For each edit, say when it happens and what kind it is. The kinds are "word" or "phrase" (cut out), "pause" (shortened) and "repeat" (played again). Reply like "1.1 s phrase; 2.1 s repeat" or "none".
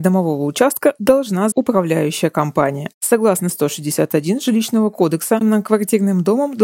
1.5 s word; 3.5 s word; 5.4 s word